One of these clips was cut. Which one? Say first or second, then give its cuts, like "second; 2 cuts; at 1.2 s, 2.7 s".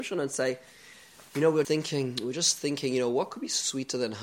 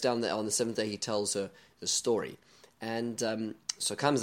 first; 1 cut; at 1.6 s